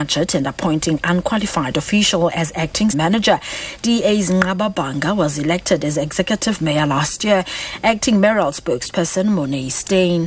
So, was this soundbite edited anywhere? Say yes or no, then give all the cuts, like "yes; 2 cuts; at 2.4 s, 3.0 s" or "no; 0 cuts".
yes; 1 cut; at 2.9 s